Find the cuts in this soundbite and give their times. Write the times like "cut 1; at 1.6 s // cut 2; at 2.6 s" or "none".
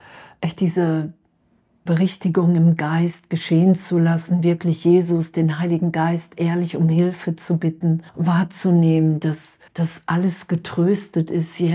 cut 1; at 1.9 s // cut 2; at 8.1 s // cut 3; at 9.7 s